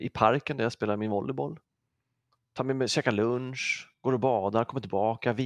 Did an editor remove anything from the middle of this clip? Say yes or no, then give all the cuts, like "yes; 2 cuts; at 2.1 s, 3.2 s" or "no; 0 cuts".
no; 0 cuts